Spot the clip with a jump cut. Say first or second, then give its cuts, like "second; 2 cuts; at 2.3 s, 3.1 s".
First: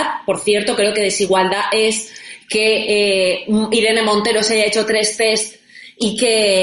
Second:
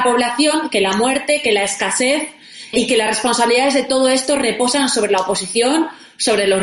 second; 1 cut; at 2.7 s